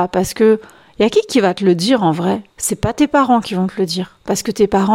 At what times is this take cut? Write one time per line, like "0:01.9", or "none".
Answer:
0:02.5